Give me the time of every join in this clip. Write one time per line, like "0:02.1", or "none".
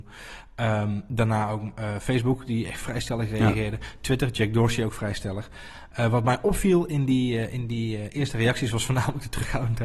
none